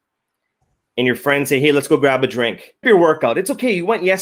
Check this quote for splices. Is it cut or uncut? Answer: cut